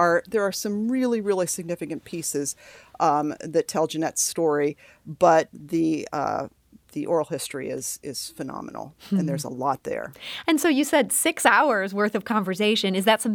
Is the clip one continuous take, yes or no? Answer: yes